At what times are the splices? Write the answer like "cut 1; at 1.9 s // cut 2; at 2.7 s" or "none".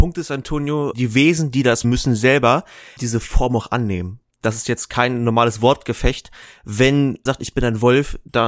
cut 1; at 0.9 s // cut 2; at 1.8 s // cut 3; at 3.0 s // cut 4; at 7.3 s